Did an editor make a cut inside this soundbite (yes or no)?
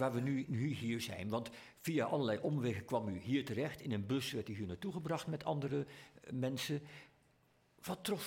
no